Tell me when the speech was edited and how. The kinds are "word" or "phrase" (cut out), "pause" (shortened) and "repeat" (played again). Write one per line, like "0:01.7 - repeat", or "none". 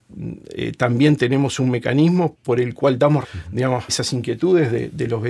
0:02.3 - word
0:03.2 - word
0:03.9 - word